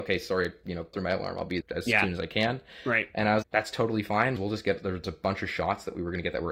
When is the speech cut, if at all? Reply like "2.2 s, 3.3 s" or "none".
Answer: 0.9 s, 1.6 s, 3.4 s, 4.4 s, 5.0 s